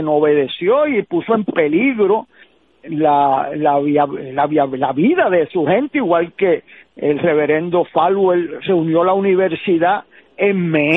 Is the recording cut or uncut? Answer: uncut